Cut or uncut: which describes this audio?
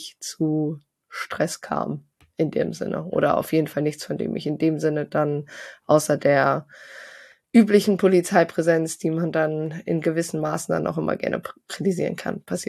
uncut